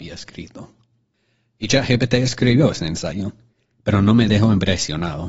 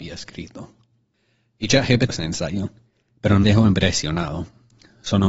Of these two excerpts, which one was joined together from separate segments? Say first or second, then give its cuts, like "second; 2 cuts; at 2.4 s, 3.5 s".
second; 2 cuts; at 2.1 s, 3.4 s